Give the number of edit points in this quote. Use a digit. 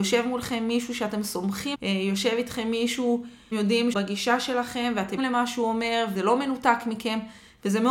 5